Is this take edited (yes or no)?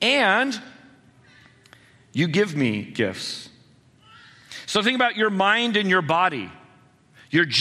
no